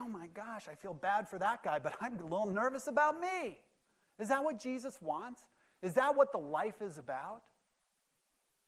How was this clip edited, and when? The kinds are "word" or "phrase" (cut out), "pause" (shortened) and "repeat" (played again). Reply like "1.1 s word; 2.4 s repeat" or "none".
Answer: none